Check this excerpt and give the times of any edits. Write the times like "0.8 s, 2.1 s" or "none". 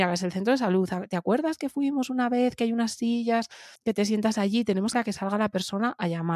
3.8 s, 4.9 s